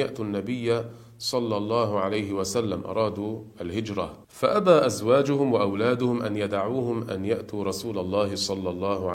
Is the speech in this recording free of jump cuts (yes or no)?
no